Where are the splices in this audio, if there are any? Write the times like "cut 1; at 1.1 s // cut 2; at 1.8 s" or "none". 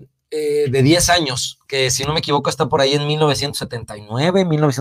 none